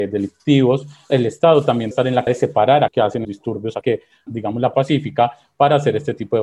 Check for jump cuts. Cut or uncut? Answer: cut